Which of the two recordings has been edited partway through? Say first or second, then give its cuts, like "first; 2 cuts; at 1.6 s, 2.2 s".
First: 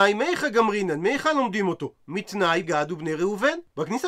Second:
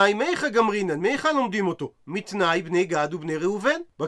first; 1 cut; at 2.6 s